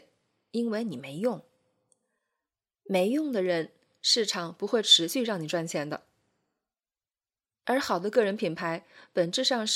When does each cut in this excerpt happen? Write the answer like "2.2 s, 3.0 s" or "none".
none